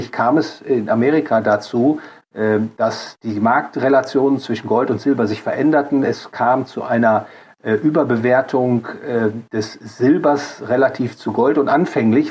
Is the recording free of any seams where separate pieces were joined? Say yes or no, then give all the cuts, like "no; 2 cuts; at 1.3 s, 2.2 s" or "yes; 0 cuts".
yes; 0 cuts